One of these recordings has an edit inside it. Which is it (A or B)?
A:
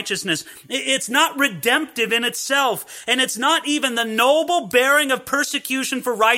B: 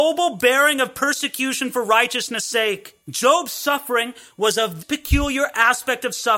B